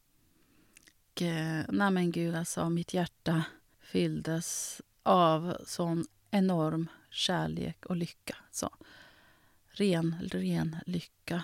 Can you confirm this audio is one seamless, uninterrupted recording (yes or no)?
yes